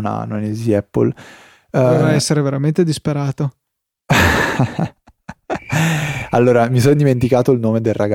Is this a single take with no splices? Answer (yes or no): yes